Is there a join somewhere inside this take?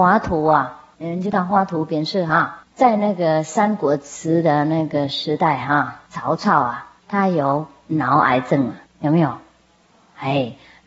yes; 5 cuts; at 0.9 s, 2.7 s, 6.0 s, 7.0 s, 8.8 s

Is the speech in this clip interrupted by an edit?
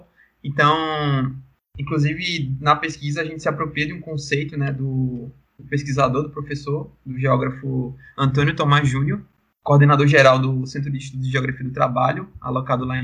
no; 0 cuts

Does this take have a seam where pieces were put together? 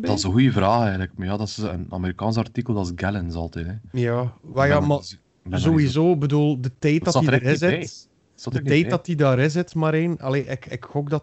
no; 0 cuts

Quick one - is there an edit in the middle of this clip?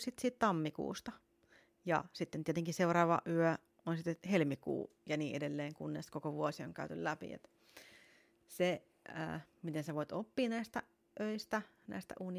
no; 0 cuts

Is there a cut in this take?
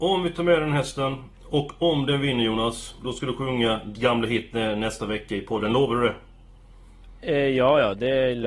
yes; 2 cuts; at 1.3 s, 3.9 s

